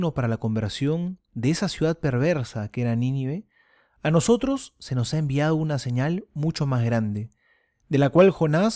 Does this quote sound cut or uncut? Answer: uncut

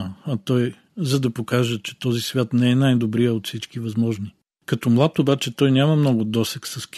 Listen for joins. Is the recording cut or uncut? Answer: uncut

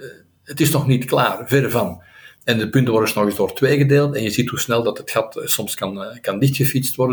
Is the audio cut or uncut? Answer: uncut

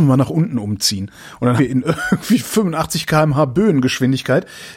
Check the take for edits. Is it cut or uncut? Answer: cut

